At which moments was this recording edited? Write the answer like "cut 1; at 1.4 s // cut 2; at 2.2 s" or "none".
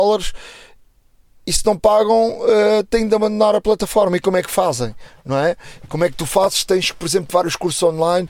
none